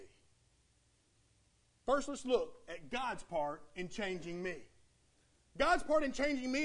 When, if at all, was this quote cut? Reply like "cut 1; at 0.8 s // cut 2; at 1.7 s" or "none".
none